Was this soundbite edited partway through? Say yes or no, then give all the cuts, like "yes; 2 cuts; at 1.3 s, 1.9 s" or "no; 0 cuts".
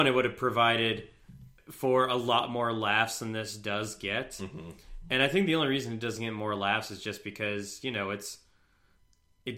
yes; 1 cut; at 1.6 s